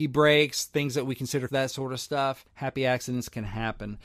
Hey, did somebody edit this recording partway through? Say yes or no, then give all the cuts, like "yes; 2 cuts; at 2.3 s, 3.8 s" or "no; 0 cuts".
yes; 2 cuts; at 1.5 s, 2.5 s